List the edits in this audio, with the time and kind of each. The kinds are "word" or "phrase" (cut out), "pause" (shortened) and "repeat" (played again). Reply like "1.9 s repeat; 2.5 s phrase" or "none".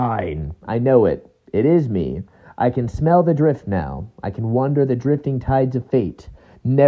none